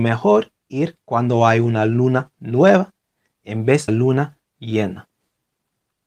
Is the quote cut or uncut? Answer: cut